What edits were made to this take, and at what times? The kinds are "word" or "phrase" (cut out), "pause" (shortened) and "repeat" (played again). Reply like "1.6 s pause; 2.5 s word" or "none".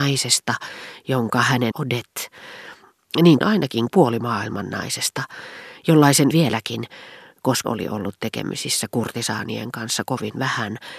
1.7 s phrase; 3.4 s word; 3.9 s word; 6.3 s phrase; 7.6 s word